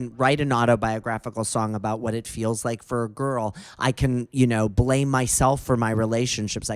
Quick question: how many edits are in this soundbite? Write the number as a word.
zero